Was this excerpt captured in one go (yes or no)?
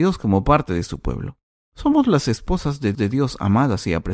no